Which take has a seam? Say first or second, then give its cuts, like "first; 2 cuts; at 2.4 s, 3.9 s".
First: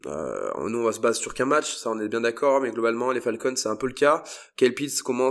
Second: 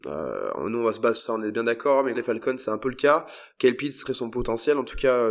second; 3 cuts; at 1.2 s, 2.1 s, 4.0 s